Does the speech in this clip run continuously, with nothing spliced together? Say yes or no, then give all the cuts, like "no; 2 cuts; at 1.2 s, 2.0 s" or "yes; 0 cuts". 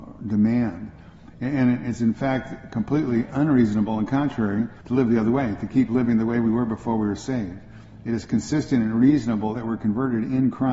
no; 2 cuts; at 4.8 s, 9.6 s